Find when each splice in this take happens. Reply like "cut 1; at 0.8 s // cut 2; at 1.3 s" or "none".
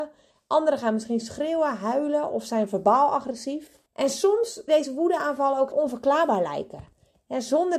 cut 1; at 3.9 s // cut 2; at 4.7 s // cut 3; at 5.7 s